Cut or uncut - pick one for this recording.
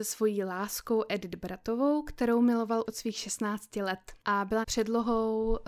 cut